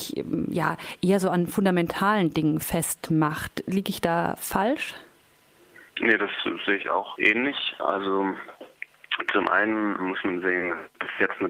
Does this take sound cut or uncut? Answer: cut